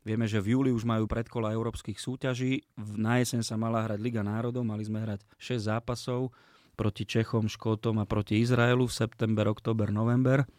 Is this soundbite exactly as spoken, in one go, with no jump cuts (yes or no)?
no